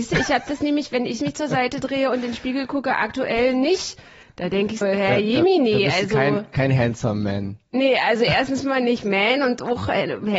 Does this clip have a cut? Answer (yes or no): yes